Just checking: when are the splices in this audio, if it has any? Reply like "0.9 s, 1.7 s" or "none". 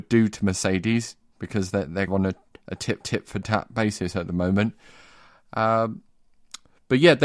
2.1 s, 3.0 s